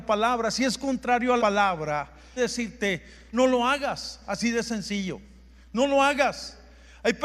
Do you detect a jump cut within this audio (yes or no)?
yes